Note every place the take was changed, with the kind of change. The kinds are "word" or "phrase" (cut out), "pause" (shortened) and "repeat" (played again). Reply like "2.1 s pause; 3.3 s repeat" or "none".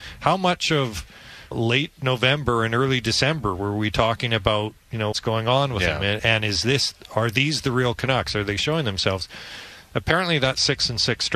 1.5 s word; 4.8 s pause; 5.1 s word; 6.2 s word